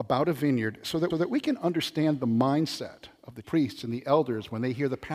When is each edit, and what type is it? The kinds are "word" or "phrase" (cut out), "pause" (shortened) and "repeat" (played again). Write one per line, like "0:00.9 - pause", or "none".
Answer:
0:01.1 - repeat
0:03.4 - word